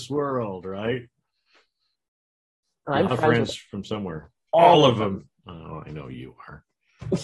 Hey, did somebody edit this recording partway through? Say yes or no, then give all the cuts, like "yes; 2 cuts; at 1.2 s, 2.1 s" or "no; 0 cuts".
no; 0 cuts